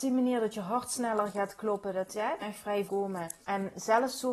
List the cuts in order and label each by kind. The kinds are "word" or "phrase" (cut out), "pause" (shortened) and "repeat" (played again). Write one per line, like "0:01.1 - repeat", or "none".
0:02.4 - phrase
0:02.9 - word
0:03.4 - pause